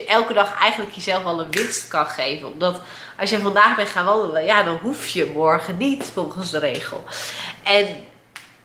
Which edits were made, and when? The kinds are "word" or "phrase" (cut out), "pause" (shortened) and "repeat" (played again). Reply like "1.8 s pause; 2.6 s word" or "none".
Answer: none